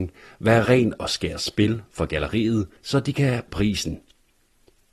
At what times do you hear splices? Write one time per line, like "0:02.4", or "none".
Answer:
0:02.8
0:03.5